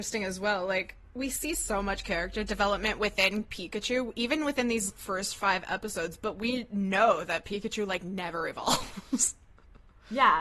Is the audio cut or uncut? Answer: uncut